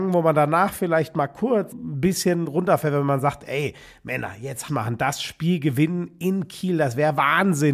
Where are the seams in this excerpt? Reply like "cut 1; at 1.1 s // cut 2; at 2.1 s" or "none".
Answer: cut 1; at 1.7 s // cut 2; at 4.7 s